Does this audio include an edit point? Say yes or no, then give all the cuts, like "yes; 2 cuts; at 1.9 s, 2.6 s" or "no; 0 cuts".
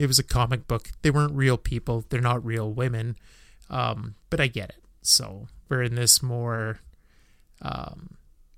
no; 0 cuts